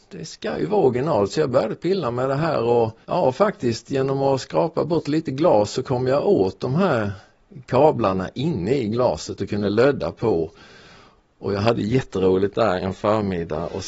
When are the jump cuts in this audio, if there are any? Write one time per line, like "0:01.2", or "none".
0:03.0
0:12.8